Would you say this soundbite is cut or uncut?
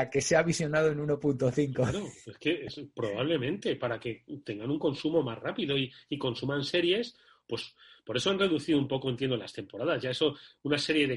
uncut